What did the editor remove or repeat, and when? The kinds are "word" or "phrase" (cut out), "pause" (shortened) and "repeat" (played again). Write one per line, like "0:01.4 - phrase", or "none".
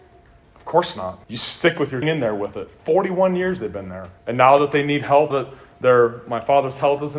0:01.2 - pause
0:02.0 - phrase
0:04.2 - pause
0:05.3 - word